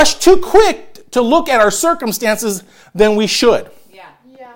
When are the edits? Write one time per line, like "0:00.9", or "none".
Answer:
none